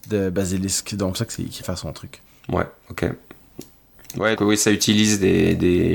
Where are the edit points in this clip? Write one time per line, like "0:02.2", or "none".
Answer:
0:01.1
0:01.6
0:02.3
0:04.4